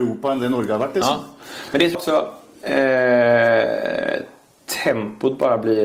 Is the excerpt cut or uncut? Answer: cut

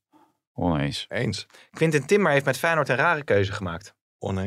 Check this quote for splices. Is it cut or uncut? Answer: uncut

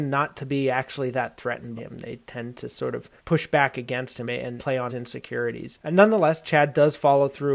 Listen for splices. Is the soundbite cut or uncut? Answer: cut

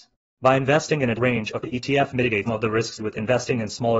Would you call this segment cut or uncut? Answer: cut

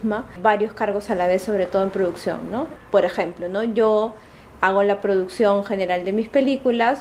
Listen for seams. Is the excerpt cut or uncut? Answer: uncut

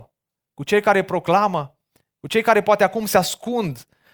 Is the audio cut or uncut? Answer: uncut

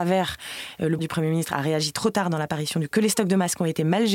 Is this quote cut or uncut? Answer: cut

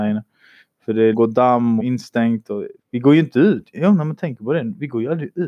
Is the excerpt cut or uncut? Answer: cut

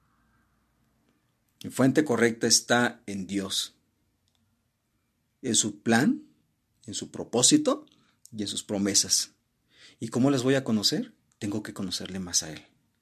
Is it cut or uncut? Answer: uncut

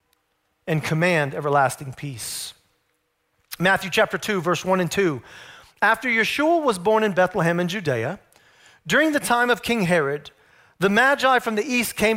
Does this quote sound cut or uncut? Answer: uncut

